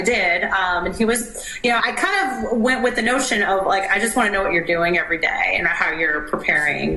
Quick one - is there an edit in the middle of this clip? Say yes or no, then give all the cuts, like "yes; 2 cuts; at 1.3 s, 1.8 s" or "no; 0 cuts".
yes; 1 cut; at 1.8 s